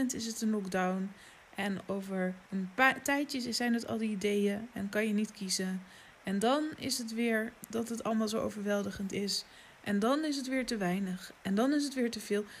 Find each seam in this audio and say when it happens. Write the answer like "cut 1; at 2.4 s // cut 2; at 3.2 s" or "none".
cut 1; at 2.5 s